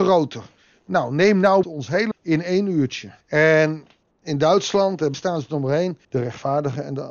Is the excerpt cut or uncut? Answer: cut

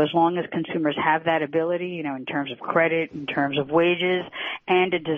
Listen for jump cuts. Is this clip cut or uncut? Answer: uncut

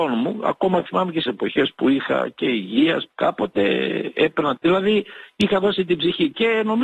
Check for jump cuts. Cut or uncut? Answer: cut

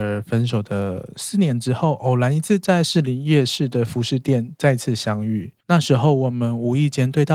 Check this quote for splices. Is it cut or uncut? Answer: cut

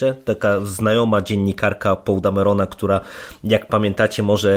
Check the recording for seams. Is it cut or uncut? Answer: uncut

